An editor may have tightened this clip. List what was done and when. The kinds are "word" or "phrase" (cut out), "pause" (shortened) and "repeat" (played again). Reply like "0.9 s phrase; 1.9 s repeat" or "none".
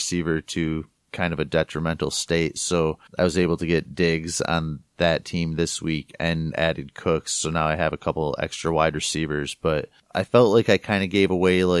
3.1 s pause